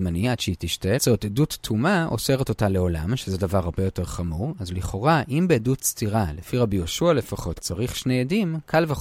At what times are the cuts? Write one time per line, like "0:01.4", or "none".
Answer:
0:01.0
0:07.6